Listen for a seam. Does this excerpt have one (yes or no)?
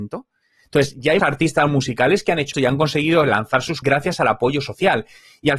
yes